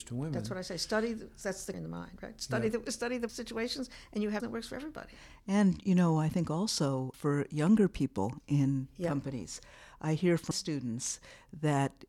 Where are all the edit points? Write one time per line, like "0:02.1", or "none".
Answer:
0:01.7
0:03.3
0:04.4
0:07.1
0:10.5